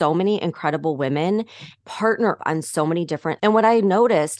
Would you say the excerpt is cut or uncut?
cut